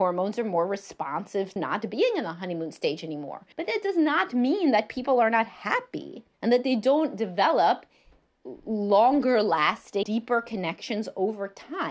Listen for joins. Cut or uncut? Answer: cut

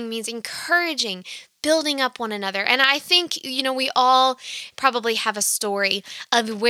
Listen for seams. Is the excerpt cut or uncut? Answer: uncut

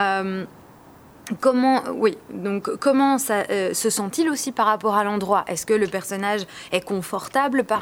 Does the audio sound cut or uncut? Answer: uncut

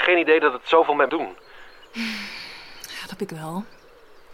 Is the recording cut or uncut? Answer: cut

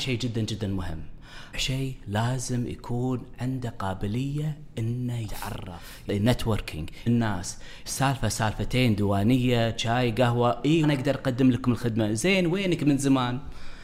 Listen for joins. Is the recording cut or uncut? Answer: cut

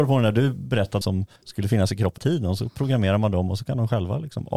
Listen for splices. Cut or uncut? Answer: cut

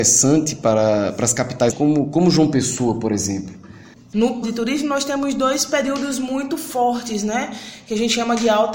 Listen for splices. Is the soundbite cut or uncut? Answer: cut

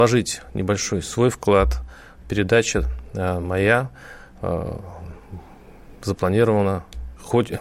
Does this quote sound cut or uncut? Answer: uncut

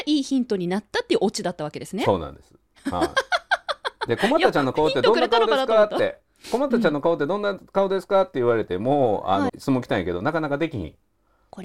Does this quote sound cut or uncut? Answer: cut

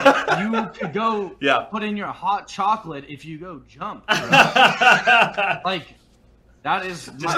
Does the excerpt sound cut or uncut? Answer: uncut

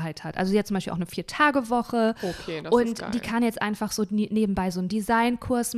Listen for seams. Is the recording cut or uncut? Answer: uncut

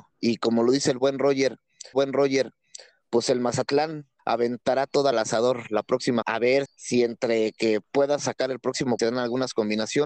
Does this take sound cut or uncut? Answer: cut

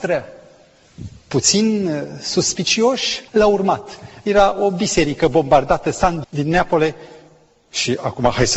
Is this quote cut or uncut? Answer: cut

